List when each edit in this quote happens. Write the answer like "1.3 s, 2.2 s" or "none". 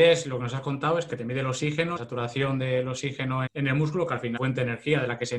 1.1 s, 2.0 s, 3.5 s, 4.4 s